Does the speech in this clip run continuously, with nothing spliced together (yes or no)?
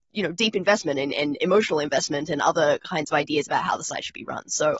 yes